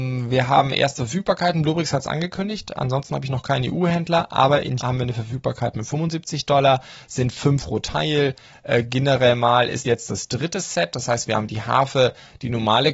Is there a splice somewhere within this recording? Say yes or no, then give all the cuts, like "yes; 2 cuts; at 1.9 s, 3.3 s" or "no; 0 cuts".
yes; 3 cuts; at 4.8 s, 7.6 s, 9.8 s